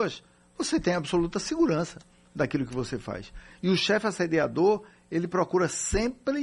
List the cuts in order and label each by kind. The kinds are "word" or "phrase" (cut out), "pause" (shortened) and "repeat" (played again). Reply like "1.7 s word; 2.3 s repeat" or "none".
none